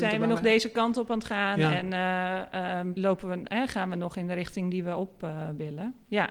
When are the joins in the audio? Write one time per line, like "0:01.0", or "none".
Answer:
0:03.0